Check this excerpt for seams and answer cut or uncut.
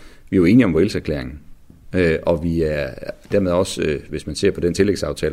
uncut